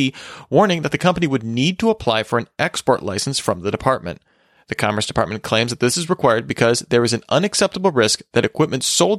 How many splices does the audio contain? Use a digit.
0